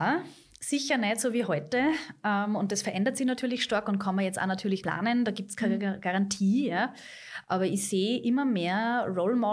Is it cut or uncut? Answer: cut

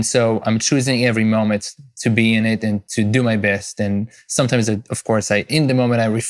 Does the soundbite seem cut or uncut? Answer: uncut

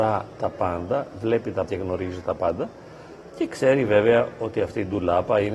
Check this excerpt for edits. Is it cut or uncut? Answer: cut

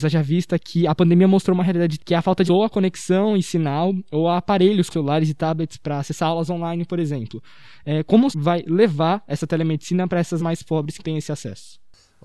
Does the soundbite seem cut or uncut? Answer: cut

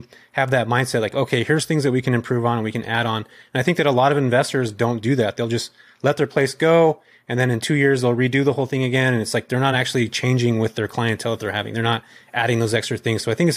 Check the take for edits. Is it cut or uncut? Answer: uncut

